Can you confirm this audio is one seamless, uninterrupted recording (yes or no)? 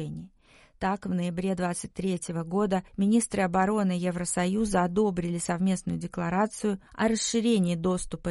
no